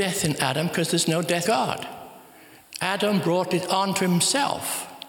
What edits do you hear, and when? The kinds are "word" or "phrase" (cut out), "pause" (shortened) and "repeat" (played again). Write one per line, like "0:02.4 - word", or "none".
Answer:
0:01.4 - word